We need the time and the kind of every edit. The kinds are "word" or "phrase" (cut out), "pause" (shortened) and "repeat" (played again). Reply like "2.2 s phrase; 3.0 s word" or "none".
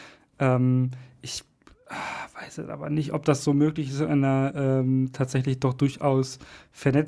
none